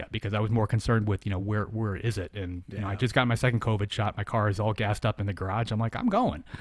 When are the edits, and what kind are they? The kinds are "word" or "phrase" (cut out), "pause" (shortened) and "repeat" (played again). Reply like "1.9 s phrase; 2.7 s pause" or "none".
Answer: none